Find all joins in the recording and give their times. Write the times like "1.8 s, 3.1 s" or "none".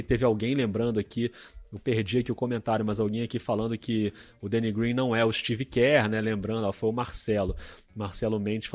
none